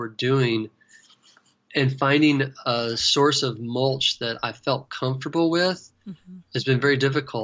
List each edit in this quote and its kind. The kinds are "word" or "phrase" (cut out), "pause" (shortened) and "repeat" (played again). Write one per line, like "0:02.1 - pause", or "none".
none